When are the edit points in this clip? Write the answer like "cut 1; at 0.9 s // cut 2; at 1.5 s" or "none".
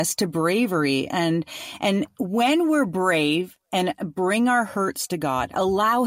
none